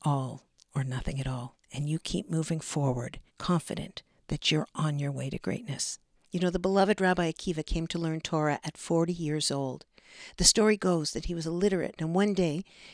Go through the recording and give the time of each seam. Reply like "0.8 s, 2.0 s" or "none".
1.6 s, 3.3 s, 6.1 s, 12.0 s